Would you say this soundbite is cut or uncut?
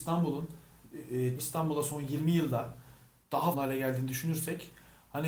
cut